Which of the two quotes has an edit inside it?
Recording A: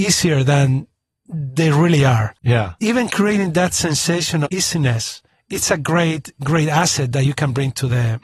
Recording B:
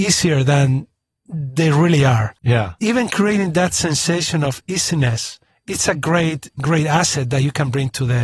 A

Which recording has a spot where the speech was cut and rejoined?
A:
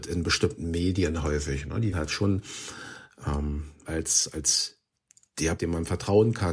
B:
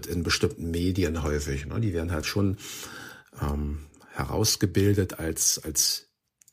A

